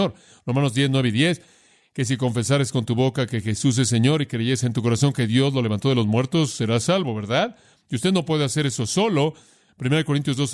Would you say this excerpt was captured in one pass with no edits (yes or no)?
yes